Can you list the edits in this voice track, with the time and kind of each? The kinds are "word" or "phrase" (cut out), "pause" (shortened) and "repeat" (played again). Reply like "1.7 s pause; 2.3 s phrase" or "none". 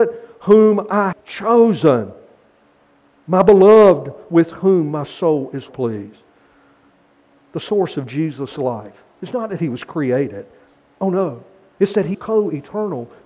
1.1 s word; 5.7 s word; 12.1 s word